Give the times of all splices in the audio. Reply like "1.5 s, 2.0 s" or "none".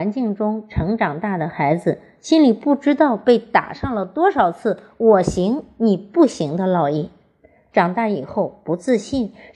none